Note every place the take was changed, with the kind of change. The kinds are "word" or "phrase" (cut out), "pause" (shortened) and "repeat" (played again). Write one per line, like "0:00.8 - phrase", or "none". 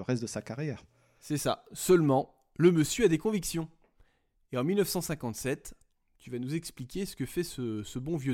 none